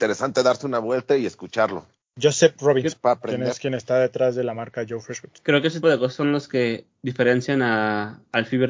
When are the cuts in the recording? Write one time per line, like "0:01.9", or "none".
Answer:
0:02.0
0:02.9
0:05.4
0:05.8